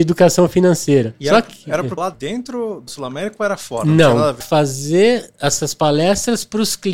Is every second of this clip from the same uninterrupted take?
no; 3 cuts; at 2.0 s, 2.9 s, 4.4 s

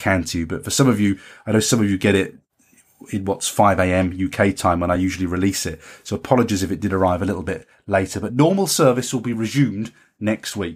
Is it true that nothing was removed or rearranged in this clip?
yes; 0 cuts

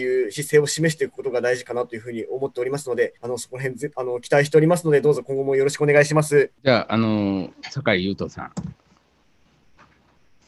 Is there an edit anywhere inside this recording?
yes; 3 cuts; at 3.2 s, 6.6 s, 7.5 s

